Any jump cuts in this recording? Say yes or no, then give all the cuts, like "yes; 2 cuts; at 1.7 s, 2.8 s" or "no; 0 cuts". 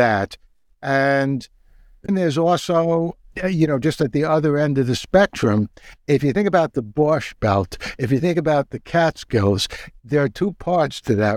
yes; 1 cut; at 2.1 s